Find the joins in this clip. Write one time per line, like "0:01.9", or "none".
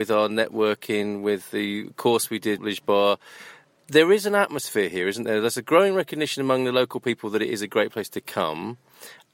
0:02.6